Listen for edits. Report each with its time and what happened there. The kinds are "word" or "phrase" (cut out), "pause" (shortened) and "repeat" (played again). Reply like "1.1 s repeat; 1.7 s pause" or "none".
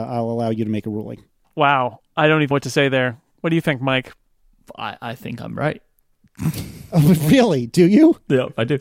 2.5 s word; 3.3 s pause